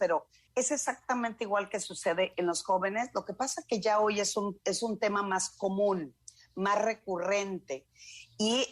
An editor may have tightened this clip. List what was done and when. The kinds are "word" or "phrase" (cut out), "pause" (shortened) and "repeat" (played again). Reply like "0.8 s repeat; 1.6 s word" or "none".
none